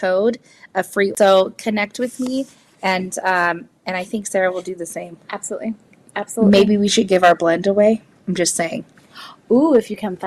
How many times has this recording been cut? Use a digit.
0